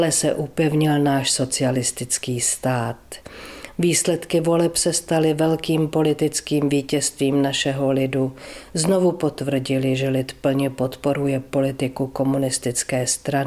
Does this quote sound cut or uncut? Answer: uncut